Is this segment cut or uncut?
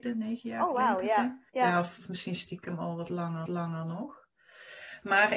cut